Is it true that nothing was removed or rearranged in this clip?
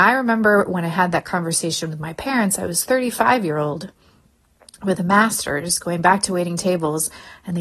yes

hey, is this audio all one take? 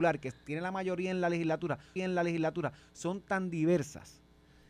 no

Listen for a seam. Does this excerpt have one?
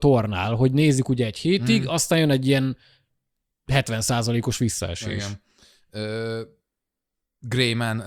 no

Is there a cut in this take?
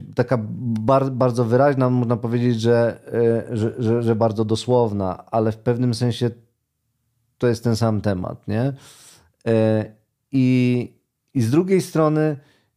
no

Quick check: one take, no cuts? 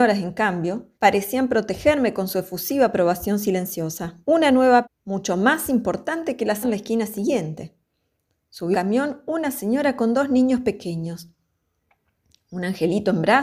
no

